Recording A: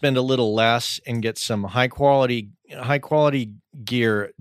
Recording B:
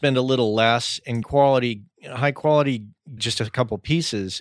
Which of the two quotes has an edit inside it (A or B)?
B